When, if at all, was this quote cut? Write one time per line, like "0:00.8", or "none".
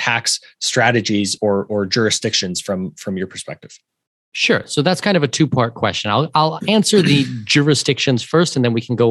none